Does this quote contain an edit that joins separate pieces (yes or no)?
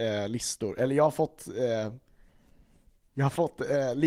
no